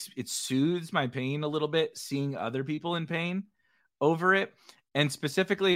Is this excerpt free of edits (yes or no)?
yes